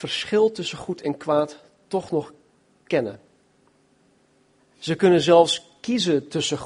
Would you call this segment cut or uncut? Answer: uncut